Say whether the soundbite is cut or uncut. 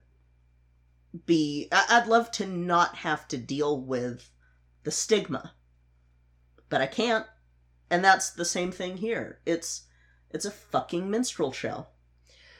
uncut